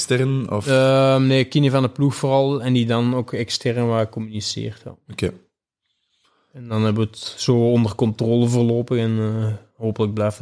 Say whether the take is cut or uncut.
uncut